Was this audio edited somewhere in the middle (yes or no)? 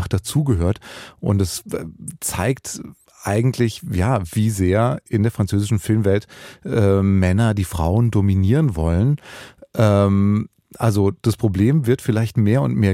no